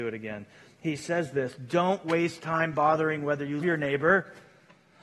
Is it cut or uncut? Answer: cut